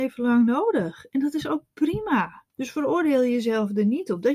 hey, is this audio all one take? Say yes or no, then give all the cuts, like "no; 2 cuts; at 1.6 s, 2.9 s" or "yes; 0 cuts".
no; 1 cut; at 2.5 s